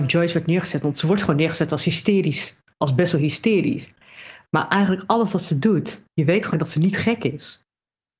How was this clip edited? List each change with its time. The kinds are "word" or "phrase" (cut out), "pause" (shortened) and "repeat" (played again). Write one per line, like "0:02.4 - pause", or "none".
0:06.5 - word